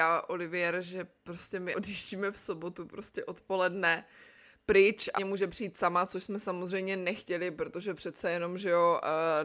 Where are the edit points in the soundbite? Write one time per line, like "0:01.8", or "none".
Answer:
0:01.7
0:05.2